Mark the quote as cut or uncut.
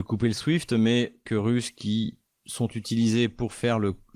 cut